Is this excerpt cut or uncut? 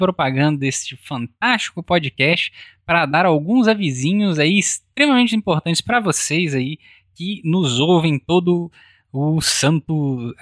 uncut